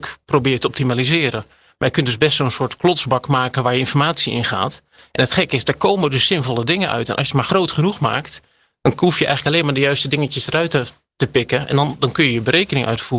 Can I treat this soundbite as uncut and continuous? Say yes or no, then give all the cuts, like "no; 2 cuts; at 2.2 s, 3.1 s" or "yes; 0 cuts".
yes; 0 cuts